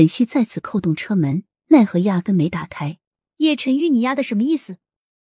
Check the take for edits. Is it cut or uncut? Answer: cut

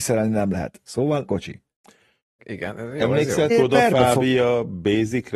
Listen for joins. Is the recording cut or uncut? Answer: cut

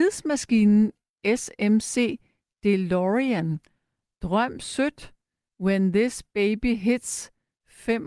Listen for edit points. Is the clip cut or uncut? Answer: uncut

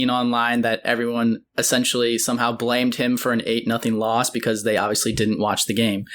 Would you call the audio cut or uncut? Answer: uncut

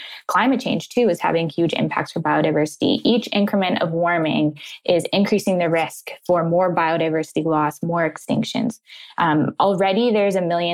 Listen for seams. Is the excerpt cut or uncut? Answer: uncut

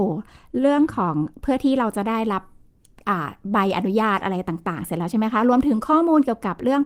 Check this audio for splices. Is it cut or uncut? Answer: uncut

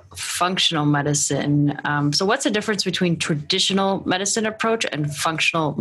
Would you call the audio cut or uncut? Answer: uncut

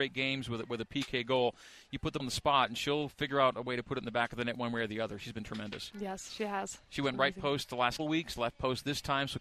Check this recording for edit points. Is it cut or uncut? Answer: cut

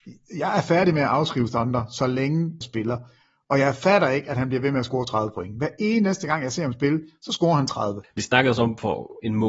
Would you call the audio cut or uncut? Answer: cut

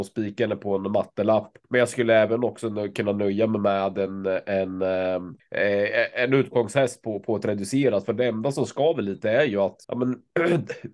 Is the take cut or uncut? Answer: cut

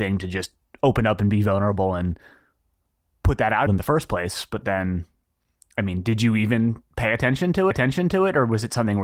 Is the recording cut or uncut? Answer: cut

